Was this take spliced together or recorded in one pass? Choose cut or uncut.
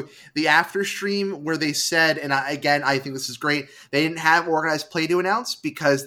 uncut